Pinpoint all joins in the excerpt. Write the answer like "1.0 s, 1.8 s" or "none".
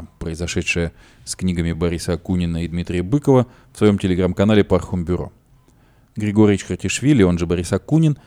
none